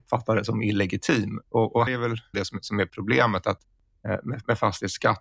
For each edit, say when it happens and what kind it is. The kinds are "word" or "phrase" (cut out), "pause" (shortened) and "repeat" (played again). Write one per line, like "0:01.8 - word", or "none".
0:01.9 - word
0:02.3 - word

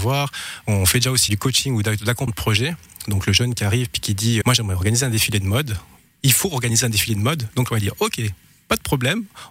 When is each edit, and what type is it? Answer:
0:01.3 - word
0:02.3 - word
0:04.4 - word

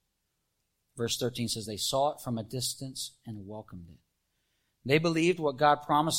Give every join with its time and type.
none

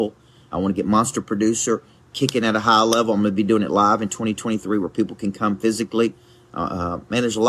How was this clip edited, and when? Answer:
none

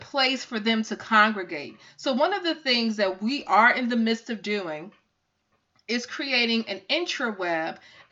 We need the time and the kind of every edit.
none

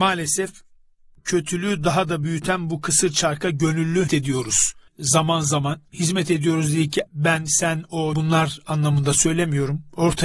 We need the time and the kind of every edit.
0:04.1 - word
0:04.9 - pause
0:05.9 - pause
0:07.1 - word
0:08.1 - word

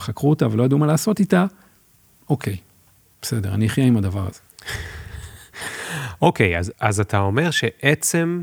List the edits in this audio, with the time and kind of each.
0:06.7 - word

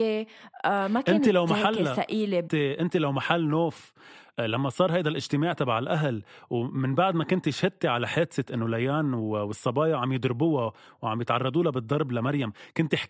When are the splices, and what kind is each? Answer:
0:02.5 - word

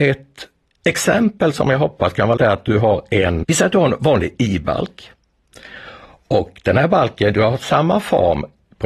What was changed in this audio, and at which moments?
0:02.4 - word
0:03.4 - word

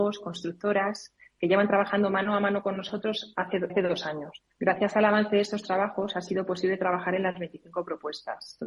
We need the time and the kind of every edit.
0:03.7 - word
0:04.5 - pause

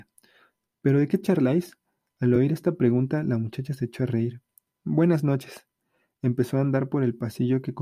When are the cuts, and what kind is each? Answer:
none

